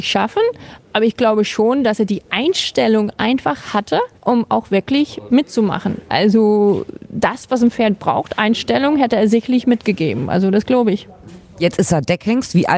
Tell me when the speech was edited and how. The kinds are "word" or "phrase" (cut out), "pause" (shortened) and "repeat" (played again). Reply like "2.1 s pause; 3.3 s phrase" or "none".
4.2 s pause